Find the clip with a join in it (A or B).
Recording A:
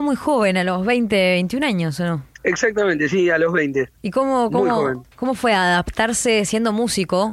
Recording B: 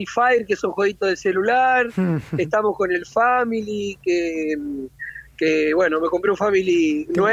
A